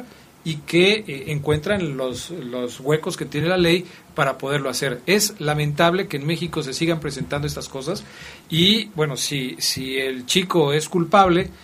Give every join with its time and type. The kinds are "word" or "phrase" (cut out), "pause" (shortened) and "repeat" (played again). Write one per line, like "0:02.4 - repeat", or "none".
none